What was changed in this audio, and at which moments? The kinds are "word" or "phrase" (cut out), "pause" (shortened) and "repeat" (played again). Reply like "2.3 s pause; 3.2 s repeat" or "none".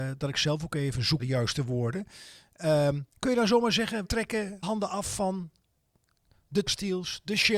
1.2 s word; 3.1 s pause; 4.0 s word; 4.6 s word; 6.7 s word